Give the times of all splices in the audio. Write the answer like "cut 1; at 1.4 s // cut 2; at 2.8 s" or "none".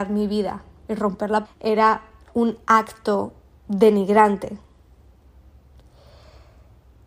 cut 1; at 1.4 s